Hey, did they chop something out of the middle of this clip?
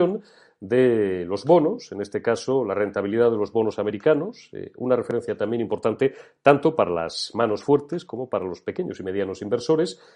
no; 0 cuts

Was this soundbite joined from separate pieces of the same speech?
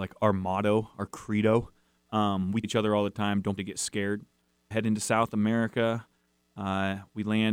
yes; 3 cuts; at 2.6 s, 3.6 s, 4.7 s

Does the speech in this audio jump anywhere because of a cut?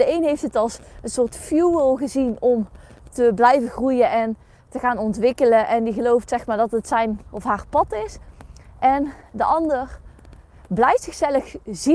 no; 0 cuts

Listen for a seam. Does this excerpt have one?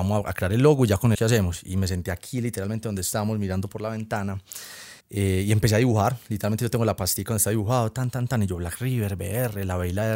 yes; 2 cuts; at 1.1 s, 5.0 s

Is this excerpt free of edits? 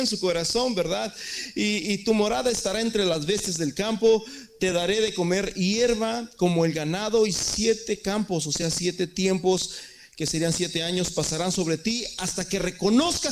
yes; 0 cuts

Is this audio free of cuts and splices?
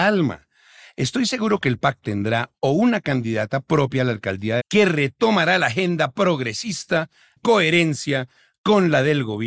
no; 4 cuts; at 2.0 s, 2.5 s, 4.6 s, 7.4 s

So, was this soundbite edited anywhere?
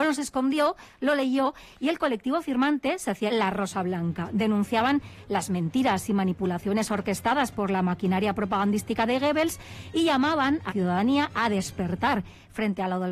yes; 2 cuts; at 3.3 s, 10.7 s

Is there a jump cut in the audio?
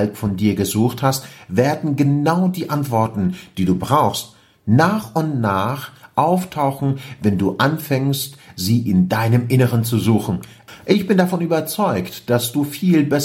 no; 0 cuts

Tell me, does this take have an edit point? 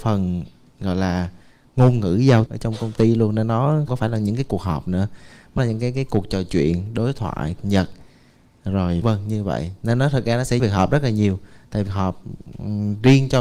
yes; 7 cuts; at 2.5 s, 3.9 s, 5.6 s, 7.6 s, 9.0 s, 10.6 s, 11.9 s

